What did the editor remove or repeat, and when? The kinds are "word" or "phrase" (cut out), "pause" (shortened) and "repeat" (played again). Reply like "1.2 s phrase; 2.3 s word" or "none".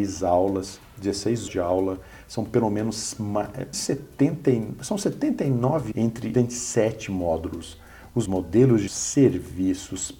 1.5 s word; 3.7 s word; 5.9 s word; 6.3 s word; 8.3 s word; 8.9 s word

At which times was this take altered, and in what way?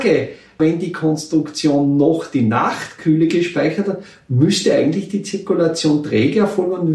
none

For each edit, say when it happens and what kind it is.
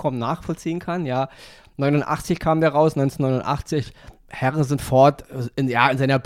none

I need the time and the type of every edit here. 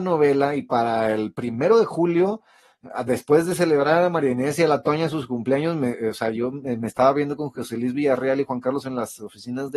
8.8 s word

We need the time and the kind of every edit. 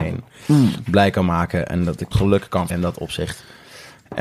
2.1 s word; 2.7 s word

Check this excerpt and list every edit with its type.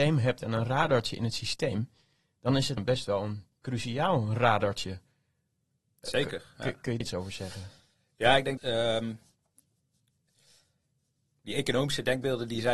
2.8 s word; 3.5 s pause; 7.0 s word; 8.6 s word

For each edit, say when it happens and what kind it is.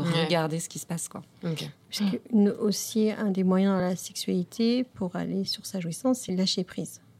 none

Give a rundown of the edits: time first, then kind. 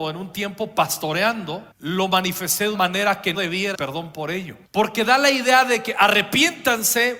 1.7 s pause; 2.7 s word; 3.3 s word; 3.7 s phrase; 4.6 s pause

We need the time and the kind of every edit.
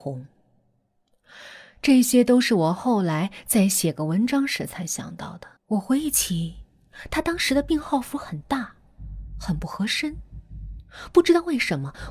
5.6 s pause

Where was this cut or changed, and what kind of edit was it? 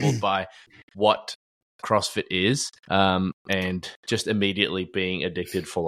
2.8 s pause; 4.0 s pause

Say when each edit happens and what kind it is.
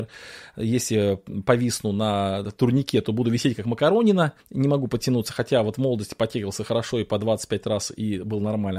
4.4 s pause

